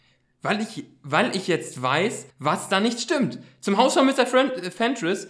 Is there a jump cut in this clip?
yes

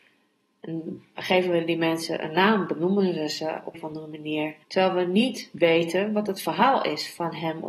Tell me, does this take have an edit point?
yes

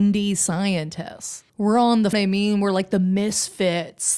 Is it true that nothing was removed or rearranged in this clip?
no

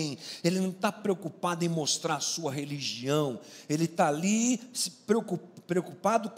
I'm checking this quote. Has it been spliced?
no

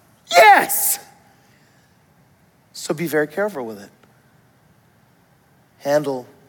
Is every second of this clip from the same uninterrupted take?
yes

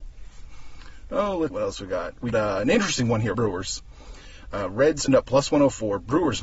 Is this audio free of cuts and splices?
no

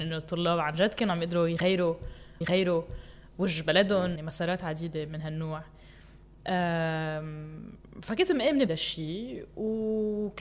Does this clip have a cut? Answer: yes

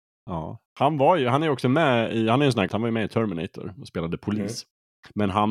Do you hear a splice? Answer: yes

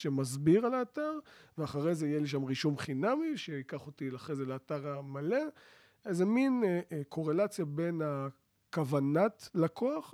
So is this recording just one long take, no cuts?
yes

